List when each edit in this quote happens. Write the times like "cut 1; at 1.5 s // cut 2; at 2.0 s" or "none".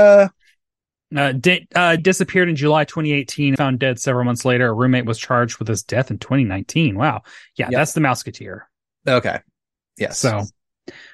cut 1; at 2.0 s // cut 2; at 3.6 s

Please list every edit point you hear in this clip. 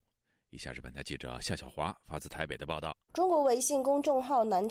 cut 1; at 3.0 s

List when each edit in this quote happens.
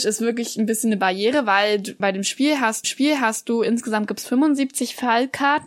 cut 1; at 2.0 s // cut 2; at 2.8 s

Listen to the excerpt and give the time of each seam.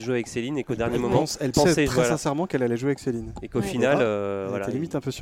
cut 1; at 1.5 s

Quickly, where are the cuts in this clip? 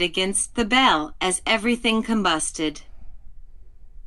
none

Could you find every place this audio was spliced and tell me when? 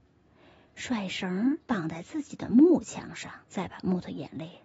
cut 1; at 1.6 s // cut 2; at 3.4 s

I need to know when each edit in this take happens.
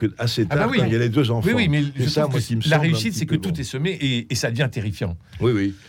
none

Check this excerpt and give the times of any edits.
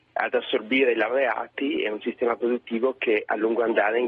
none

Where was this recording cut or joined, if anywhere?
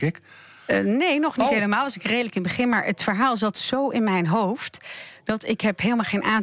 none

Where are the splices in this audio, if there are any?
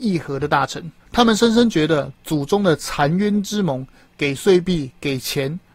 cut 1; at 1.0 s

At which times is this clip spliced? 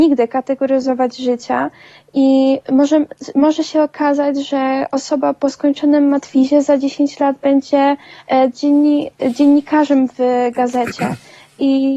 none

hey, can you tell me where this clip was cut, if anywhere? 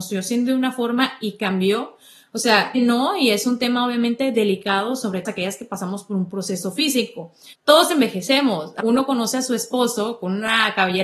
cut 1; at 2.7 s // cut 2; at 5.2 s // cut 3; at 7.5 s // cut 4; at 8.8 s

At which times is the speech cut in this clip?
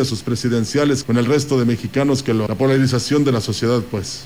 cut 1; at 1.0 s // cut 2; at 2.5 s

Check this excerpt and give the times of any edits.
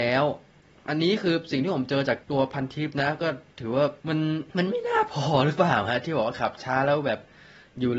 cut 1; at 2.2 s // cut 2; at 4.0 s // cut 3; at 4.5 s

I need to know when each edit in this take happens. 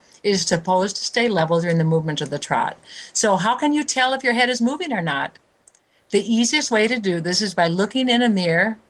none

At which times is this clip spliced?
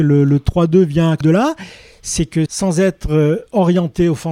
cut 1; at 1.2 s // cut 2; at 2.5 s

